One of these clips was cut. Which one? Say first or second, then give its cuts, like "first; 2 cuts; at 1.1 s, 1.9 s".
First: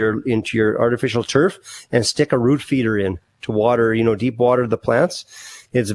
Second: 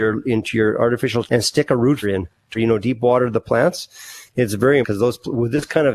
second; 4 cuts; at 1.3 s, 2.0 s, 2.6 s, 4.8 s